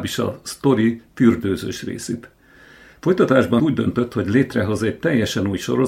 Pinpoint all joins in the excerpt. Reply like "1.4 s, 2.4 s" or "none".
3.6 s